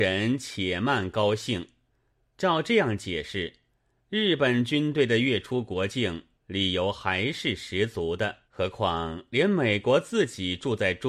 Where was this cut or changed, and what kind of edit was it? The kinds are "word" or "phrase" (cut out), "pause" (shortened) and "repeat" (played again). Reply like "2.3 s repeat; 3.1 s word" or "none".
6.4 s pause; 8.4 s pause